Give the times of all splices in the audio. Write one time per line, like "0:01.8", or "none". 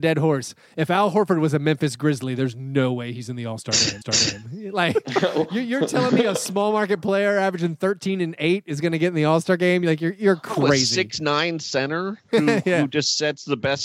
0:04.0